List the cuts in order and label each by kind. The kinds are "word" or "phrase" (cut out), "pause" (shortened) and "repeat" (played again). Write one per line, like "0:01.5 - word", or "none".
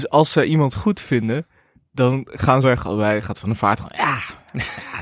0:02.6 - phrase